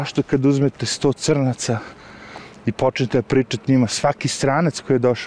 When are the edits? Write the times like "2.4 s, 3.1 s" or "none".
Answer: 3.6 s